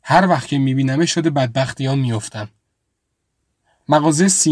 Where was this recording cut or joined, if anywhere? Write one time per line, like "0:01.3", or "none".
none